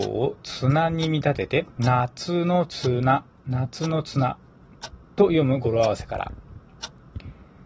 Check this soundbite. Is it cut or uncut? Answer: cut